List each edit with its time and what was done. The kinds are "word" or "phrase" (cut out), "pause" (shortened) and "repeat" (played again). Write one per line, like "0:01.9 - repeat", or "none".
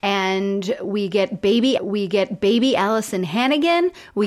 0:01.8 - repeat